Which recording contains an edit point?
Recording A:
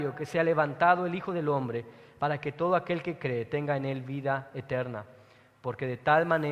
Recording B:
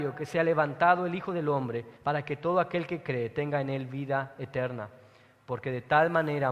B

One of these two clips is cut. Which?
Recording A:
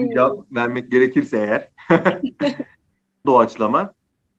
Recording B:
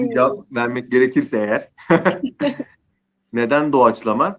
A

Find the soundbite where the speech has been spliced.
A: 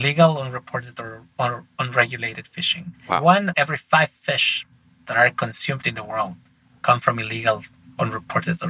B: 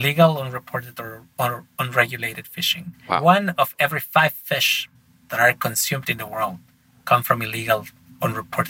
A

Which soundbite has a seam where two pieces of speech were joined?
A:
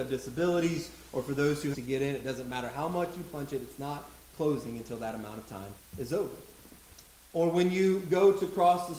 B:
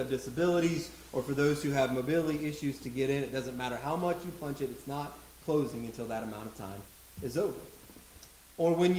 A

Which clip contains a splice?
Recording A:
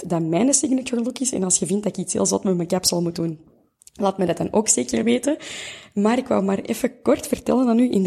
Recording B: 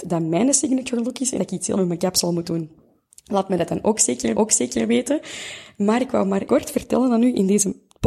B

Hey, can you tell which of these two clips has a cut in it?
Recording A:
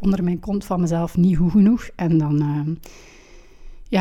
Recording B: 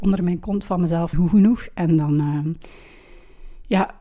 B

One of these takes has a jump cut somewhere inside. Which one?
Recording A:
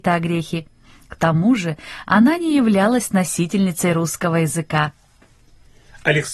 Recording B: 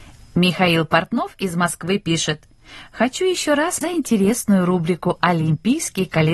B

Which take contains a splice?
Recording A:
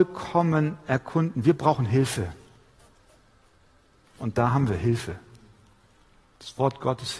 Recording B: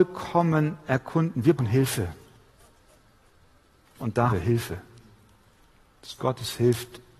B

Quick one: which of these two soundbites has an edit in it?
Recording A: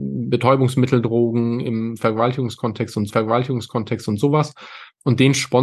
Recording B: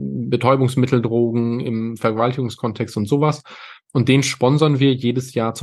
A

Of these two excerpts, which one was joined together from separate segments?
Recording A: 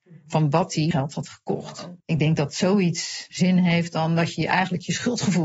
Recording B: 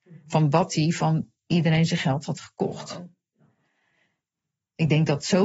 A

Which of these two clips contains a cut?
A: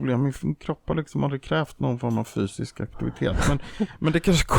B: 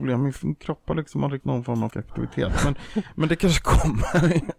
B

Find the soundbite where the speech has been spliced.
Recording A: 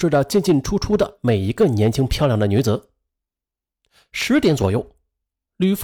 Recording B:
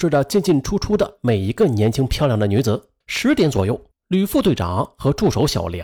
B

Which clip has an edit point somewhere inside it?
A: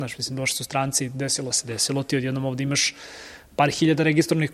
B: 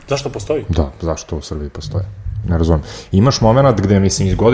A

